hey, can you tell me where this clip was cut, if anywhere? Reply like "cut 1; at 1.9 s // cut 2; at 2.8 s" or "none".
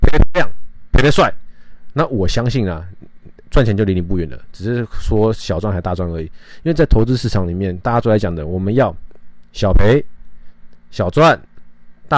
cut 1; at 7.8 s